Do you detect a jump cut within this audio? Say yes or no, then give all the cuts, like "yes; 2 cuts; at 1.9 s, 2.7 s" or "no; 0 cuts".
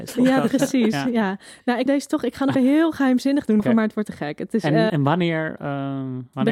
yes; 5 cuts; at 1.9 s, 2.5 s, 3.6 s, 4.0 s, 4.9 s